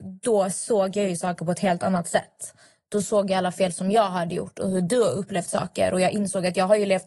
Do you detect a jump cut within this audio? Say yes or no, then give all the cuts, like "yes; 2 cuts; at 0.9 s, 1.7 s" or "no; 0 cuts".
no; 0 cuts